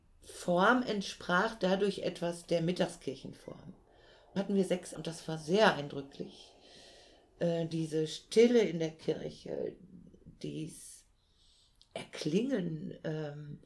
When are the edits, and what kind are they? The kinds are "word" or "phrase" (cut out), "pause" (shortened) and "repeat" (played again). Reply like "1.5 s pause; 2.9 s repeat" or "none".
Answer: 4.4 s word; 5.0 s word